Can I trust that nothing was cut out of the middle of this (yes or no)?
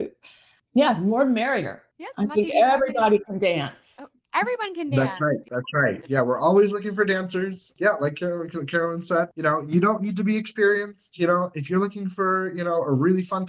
yes